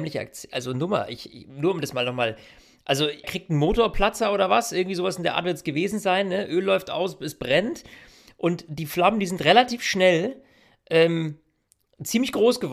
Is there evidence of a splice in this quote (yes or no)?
yes